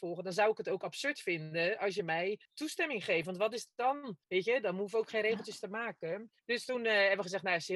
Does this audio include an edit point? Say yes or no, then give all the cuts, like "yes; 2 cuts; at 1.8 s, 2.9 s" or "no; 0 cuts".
yes; 3 cuts; at 2.5 s, 4.2 s, 6.4 s